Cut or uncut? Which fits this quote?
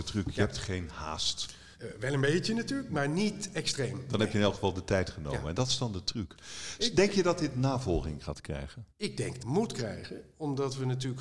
cut